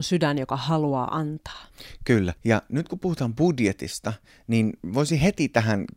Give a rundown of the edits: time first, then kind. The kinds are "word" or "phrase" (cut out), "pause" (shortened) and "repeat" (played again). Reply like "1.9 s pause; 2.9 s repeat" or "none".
2.4 s pause